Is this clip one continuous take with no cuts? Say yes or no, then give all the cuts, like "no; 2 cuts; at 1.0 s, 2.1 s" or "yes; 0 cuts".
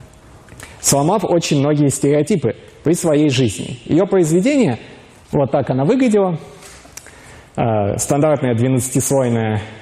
yes; 0 cuts